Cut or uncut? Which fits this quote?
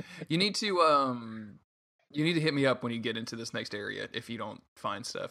uncut